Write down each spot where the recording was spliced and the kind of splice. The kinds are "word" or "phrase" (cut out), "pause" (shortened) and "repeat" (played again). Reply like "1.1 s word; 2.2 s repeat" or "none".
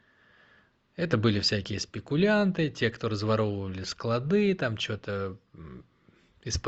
none